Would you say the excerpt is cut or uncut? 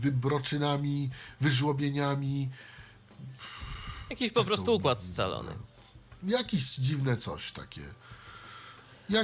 uncut